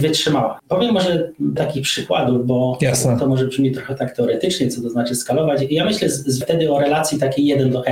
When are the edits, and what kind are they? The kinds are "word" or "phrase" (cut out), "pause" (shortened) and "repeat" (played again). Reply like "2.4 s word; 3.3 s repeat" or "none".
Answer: 1.6 s word; 6.4 s word